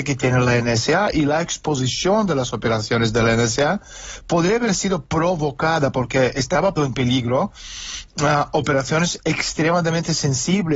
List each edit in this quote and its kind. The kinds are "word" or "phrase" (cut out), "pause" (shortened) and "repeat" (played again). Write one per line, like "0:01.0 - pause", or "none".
0:06.8 - word